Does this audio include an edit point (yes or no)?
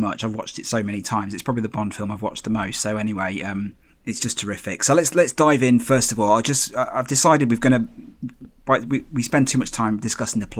no